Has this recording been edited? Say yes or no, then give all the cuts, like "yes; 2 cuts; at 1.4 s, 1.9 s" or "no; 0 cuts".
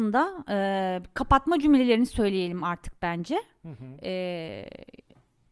no; 0 cuts